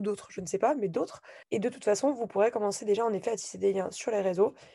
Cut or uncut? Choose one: cut